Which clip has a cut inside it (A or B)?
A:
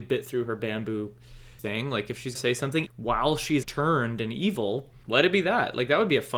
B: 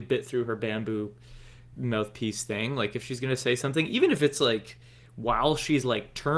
A